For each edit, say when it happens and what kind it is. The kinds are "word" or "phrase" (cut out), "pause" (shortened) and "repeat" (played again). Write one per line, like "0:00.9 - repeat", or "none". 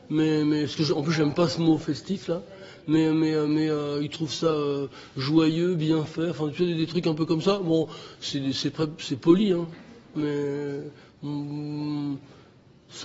none